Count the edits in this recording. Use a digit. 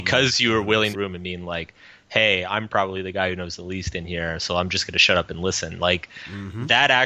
1